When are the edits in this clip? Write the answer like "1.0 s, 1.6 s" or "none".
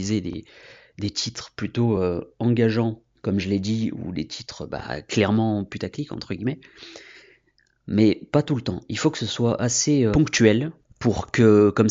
none